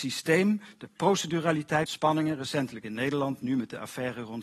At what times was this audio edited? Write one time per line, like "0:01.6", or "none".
0:01.9